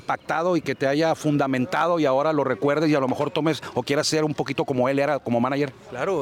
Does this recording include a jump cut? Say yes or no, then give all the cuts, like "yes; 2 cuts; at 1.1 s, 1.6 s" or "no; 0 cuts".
no; 0 cuts